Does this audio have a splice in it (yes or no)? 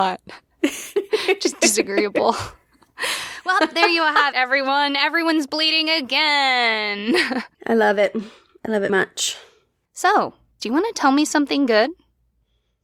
yes